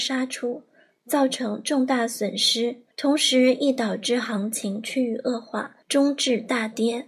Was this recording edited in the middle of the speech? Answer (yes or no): yes